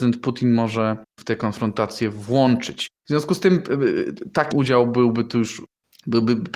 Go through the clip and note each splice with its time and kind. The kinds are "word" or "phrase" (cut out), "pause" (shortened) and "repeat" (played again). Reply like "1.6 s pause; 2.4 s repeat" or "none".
1.2 s word; 4.5 s word